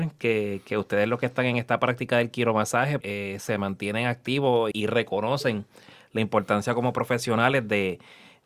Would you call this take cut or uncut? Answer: cut